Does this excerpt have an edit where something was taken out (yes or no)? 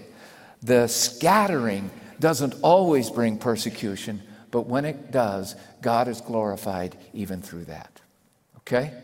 no